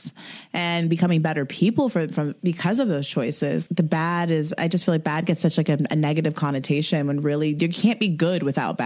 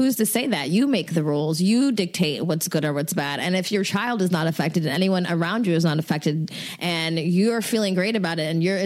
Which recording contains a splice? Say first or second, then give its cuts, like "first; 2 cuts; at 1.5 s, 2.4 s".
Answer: first; 1 cut; at 3.7 s